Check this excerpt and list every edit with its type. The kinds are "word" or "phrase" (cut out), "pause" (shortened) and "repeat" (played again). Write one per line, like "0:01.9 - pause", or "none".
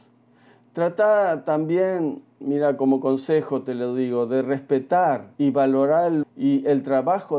0:05.3 - pause
0:06.2 - word